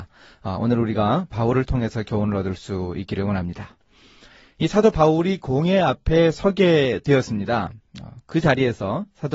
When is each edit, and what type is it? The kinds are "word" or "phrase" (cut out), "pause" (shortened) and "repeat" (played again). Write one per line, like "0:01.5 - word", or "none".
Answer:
none